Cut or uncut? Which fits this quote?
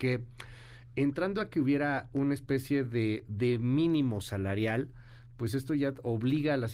uncut